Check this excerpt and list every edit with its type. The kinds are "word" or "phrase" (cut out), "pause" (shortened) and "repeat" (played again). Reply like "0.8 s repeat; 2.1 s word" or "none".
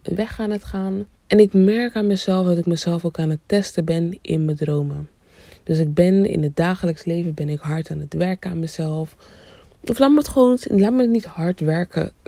1.2 s pause